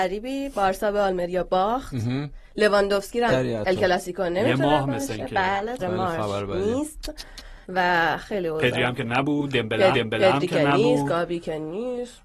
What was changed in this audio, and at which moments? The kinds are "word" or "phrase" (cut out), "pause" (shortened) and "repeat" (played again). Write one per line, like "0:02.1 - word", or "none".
0:03.3 - phrase
0:05.8 - word
0:07.6 - pause
0:09.9 - repeat

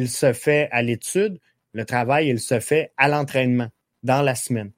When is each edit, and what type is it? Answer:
none

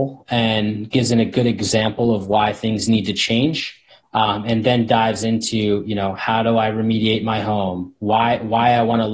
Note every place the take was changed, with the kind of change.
none

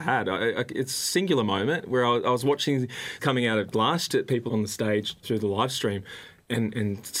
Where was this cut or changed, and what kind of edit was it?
0:03.2 - word
0:03.7 - word
0:04.1 - phrase
0:04.5 - word
0:05.2 - word

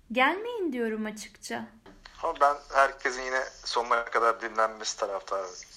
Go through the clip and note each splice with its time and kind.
0:02.1 - pause

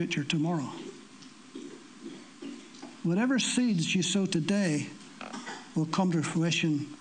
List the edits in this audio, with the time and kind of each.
none

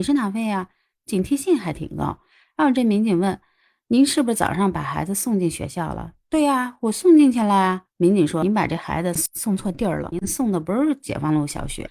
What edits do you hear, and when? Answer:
none

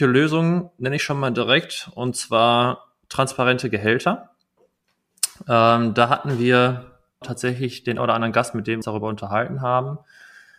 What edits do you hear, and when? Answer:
0:07.2 - word
0:08.0 - word
0:08.8 - word

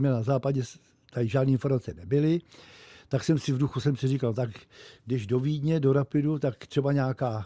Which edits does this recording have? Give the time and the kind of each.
none

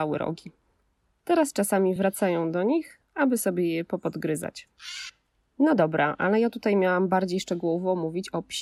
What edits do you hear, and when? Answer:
none

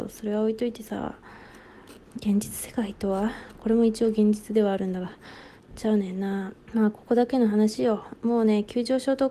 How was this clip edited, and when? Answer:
0:06.6 - pause

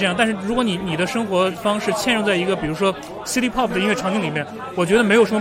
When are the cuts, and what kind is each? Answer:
none

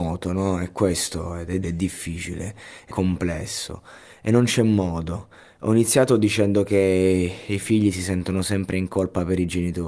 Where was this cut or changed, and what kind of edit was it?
0:01.6 - word
0:02.9 - word

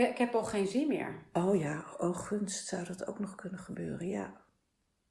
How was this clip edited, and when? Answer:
none

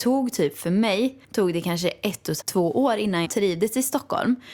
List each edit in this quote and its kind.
0:01.2 - pause
0:02.4 - word
0:03.2 - word

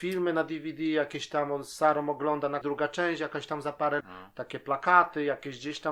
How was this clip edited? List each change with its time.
0:02.6 - phrase
0:04.0 - word

